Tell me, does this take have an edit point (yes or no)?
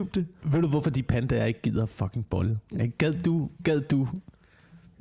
yes